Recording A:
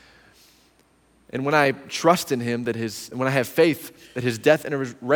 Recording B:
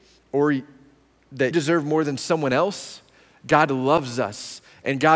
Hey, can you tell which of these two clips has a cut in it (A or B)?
B